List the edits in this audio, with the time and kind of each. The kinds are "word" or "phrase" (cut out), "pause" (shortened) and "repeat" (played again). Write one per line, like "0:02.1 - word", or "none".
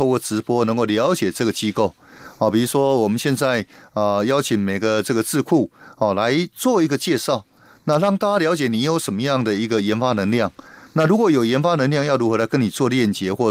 none